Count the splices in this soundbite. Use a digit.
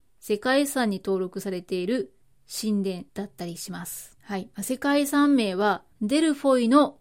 4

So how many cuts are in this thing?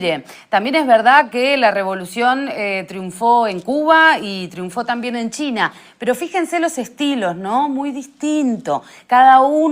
0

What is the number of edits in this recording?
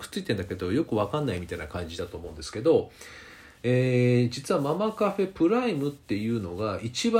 0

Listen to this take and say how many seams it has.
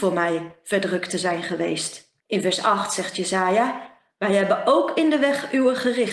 1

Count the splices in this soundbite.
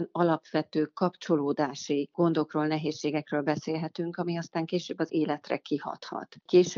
1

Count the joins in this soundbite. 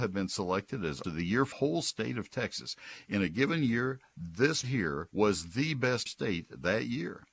5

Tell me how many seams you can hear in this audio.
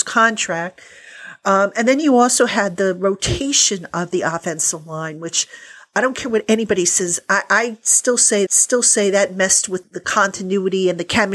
2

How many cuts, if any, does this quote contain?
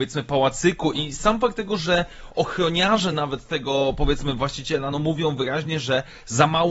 0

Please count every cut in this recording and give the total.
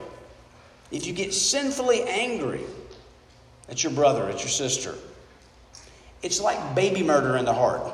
0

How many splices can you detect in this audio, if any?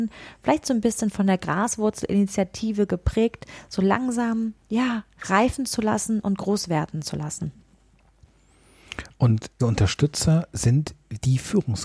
2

